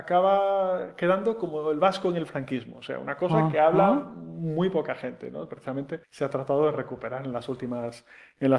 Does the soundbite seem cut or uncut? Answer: cut